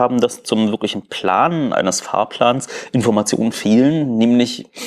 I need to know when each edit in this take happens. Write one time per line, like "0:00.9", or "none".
none